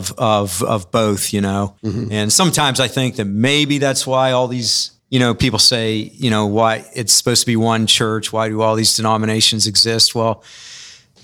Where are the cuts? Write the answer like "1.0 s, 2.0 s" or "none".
1.8 s, 5.0 s